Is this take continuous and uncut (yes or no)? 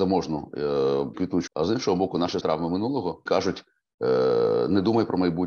no